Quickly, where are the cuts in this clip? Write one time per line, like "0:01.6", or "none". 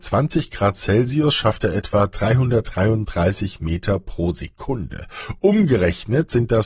none